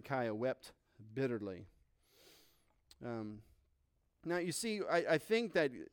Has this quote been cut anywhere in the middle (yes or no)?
no